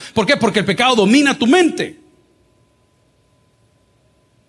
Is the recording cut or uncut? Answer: uncut